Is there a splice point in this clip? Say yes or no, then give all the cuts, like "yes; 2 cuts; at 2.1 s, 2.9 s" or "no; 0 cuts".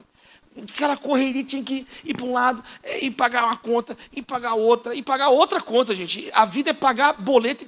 no; 0 cuts